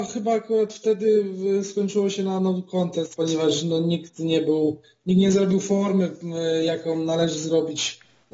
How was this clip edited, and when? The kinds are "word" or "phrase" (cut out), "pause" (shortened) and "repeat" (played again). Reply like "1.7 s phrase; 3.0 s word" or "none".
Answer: none